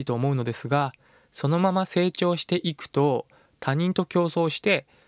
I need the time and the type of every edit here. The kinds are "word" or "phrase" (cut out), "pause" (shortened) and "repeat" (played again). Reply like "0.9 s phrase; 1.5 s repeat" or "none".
none

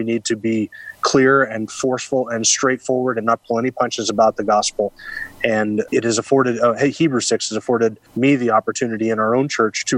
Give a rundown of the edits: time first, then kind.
5.9 s word; 8.1 s pause

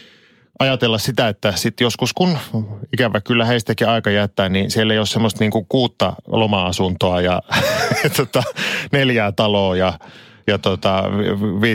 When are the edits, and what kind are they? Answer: none

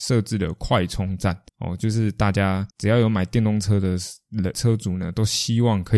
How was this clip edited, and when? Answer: 1.5 s pause; 2.7 s pause; 4.5 s word

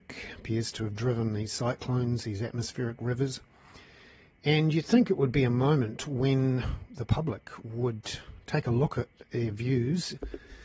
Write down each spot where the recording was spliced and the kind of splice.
none

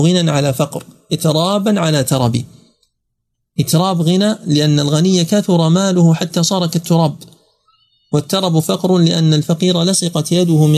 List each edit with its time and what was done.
none

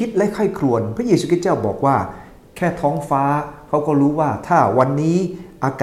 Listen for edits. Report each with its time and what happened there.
none

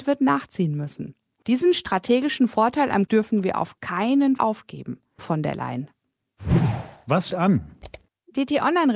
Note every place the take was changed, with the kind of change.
3.1 s word; 4.4 s word; 5.2 s word; 7.3 s word

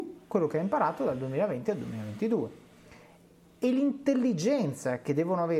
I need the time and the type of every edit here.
none

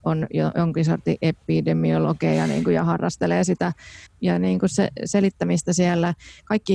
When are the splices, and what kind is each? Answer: 4.1 s phrase

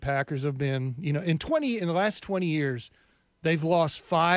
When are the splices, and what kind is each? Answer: none

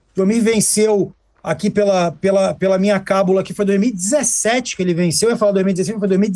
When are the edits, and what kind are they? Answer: none

